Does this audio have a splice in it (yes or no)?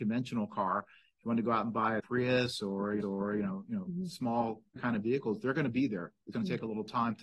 yes